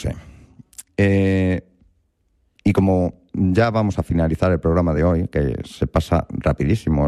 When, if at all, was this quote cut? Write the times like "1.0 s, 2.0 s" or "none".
none